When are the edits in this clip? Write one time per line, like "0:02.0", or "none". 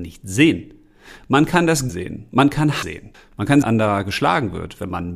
0:01.9
0:02.8
0:03.1
0:03.6